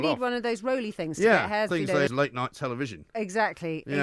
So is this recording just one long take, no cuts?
no; 2 cuts; at 1.7 s, 2.1 s

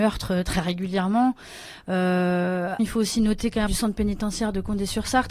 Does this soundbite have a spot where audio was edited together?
yes; 2 cuts; at 2.8 s, 3.7 s

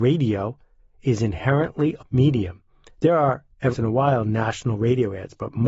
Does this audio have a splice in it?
yes; 2 cuts; at 2.0 s, 3.7 s

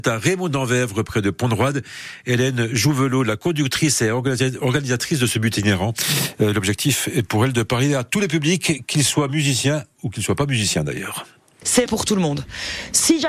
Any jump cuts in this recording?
yes; 1 cut; at 11.9 s

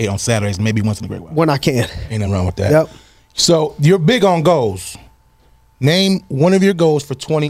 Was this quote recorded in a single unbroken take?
yes; 0 cuts

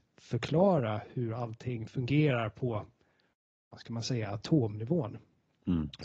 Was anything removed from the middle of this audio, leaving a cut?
no; 0 cuts

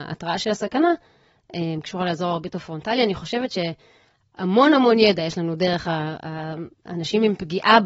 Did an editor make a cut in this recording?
no; 0 cuts

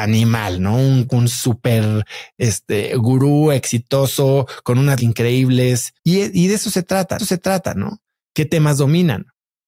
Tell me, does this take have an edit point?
yes; 4 cuts; at 1.1 s, 5.0 s, 6.0 s, 7.2 s

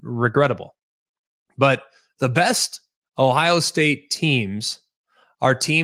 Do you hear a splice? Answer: no; 0 cuts

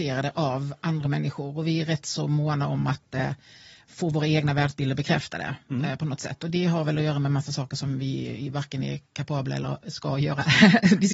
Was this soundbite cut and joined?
no; 0 cuts

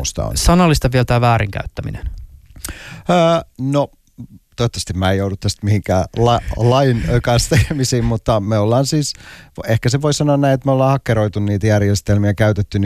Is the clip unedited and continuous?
yes; 0 cuts

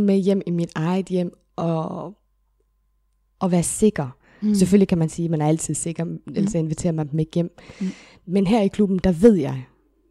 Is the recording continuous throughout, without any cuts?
yes; 0 cuts

